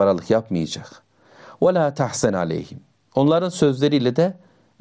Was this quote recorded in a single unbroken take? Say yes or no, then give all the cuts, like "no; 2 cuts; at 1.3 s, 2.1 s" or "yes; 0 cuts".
yes; 0 cuts